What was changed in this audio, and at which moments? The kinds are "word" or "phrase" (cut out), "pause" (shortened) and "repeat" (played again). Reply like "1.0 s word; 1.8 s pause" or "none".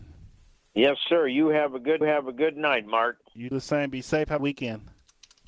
2.0 s repeat; 3.5 s word; 4.4 s phrase